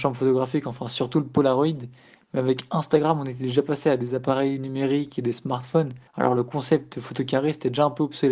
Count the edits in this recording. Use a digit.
1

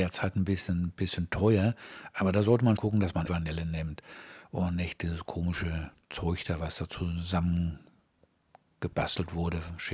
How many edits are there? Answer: 2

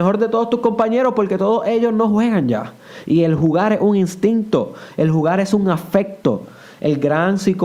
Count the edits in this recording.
0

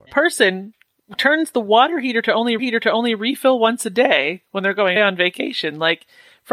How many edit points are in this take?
2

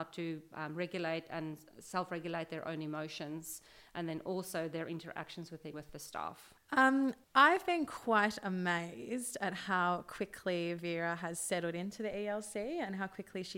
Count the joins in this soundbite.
3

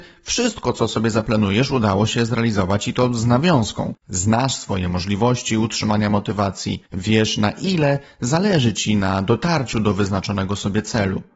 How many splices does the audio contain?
2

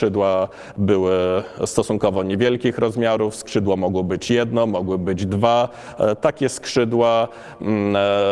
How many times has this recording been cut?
0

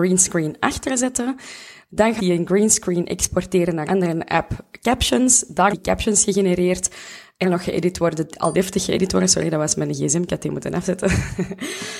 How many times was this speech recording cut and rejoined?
5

